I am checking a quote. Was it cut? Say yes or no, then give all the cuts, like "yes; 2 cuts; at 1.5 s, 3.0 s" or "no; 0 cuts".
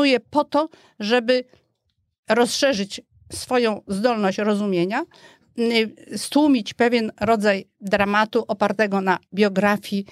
no; 0 cuts